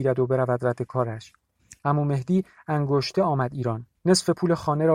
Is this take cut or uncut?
cut